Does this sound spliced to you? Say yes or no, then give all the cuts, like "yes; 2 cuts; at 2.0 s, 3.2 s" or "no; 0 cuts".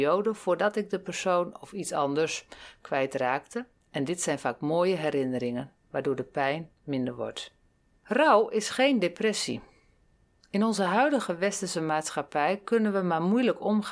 no; 0 cuts